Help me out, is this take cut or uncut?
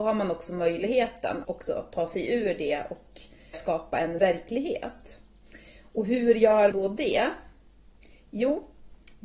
cut